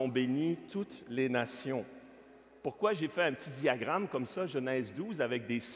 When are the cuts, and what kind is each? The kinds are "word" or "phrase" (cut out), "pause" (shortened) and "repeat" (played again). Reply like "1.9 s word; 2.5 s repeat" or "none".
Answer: none